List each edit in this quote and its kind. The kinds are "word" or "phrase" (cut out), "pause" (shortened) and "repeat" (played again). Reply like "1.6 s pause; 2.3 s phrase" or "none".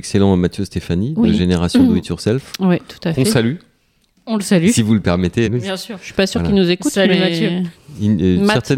5.4 s word